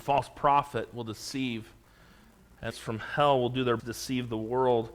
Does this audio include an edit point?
yes; 2 cuts; at 2.7 s, 3.8 s

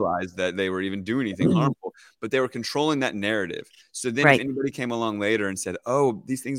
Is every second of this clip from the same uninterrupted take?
yes; 0 cuts

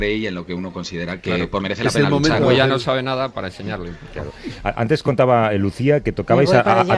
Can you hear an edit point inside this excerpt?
yes; 3 cuts; at 1.2 s, 1.6 s, 3.3 s

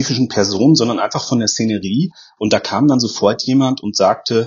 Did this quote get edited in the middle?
no; 0 cuts

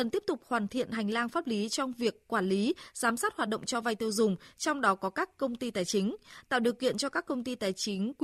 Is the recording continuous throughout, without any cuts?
yes; 0 cuts

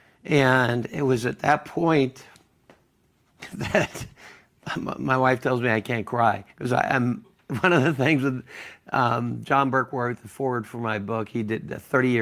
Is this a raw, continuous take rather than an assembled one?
no; 1 cut; at 6.5 s

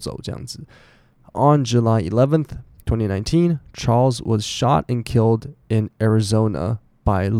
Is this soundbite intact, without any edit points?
yes; 0 cuts

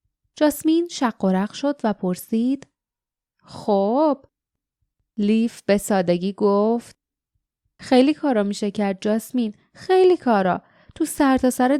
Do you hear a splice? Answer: no; 0 cuts

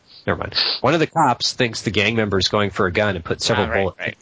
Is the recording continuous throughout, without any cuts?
yes; 0 cuts

